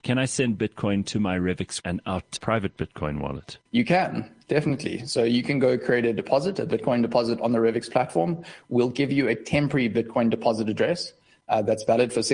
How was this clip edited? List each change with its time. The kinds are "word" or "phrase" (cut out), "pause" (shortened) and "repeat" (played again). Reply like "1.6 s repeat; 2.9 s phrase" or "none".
1.8 s word; 2.4 s word; 3.7 s pause